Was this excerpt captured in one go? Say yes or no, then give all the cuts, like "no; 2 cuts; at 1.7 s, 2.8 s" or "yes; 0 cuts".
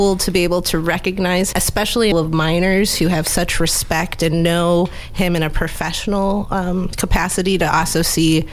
no; 2 cuts; at 1.5 s, 2.1 s